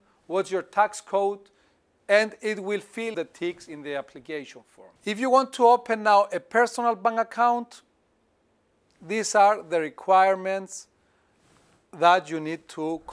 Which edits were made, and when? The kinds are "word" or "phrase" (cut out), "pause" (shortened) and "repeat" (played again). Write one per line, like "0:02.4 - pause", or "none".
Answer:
0:03.1 - phrase
0:05.0 - pause

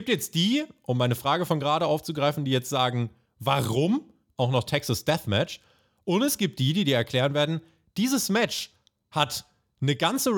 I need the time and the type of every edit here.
none

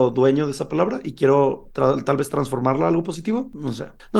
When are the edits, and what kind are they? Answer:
none

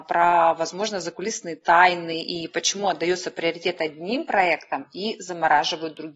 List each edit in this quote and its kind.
none

